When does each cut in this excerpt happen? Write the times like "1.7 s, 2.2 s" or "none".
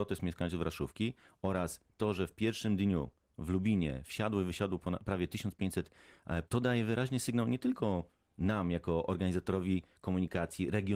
6.4 s